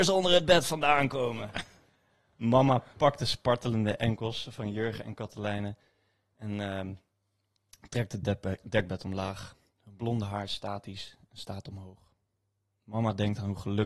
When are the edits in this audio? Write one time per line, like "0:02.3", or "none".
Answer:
none